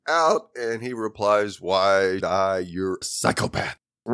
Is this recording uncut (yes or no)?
no